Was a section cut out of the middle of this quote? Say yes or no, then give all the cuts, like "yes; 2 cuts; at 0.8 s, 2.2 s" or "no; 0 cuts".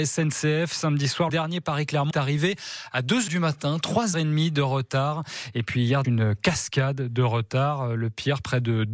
yes; 5 cuts; at 1.3 s, 2.1 s, 3.3 s, 4.1 s, 6.0 s